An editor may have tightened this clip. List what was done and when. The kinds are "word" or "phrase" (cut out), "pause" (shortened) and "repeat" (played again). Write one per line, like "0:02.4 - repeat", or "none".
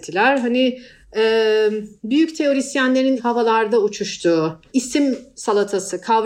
0:03.2 - word
0:04.7 - word